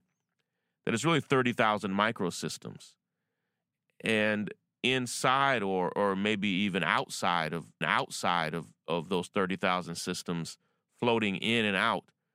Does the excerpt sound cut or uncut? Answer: cut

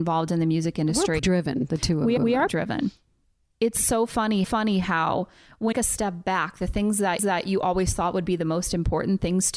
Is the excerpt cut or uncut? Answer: cut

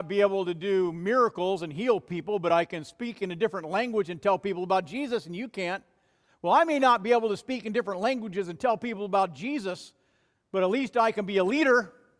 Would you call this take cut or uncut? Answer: uncut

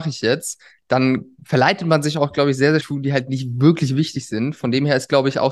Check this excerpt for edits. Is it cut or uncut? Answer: cut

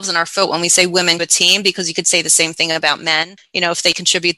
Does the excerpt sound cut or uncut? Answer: cut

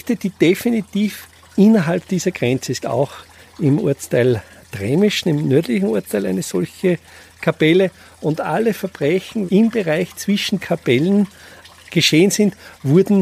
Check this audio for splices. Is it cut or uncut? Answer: cut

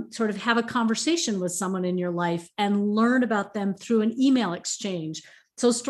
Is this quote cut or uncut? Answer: uncut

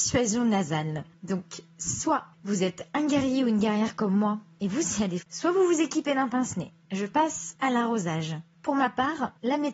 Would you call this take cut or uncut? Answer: cut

